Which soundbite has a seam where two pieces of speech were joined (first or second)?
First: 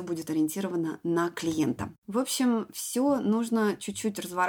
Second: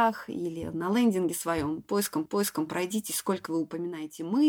second